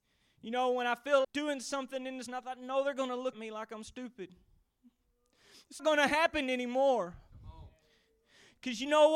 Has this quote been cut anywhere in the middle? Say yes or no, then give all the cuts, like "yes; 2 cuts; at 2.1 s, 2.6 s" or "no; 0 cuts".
yes; 4 cuts; at 1.2 s, 2.3 s, 3.3 s, 5.8 s